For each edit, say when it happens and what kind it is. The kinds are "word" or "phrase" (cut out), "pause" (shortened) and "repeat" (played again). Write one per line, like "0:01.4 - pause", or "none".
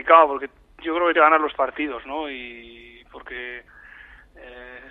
0:01.1 - word
0:01.5 - word